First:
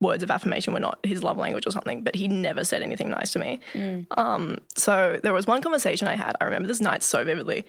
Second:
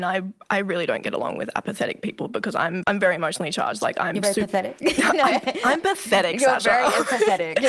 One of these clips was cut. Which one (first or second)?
second